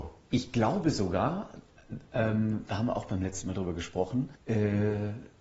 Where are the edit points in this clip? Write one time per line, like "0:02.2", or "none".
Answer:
0:04.4